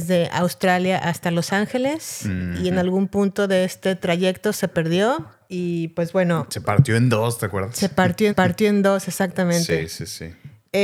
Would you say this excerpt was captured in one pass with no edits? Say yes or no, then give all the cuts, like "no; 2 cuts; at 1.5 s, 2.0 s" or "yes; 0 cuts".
no; 2 cuts; at 5.4 s, 8.3 s